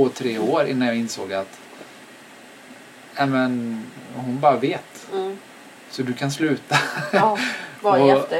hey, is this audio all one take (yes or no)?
yes